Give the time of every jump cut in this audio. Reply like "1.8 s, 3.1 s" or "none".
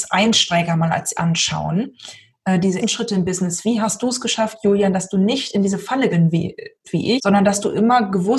1.1 s, 2.8 s, 6.1 s, 6.8 s, 7.2 s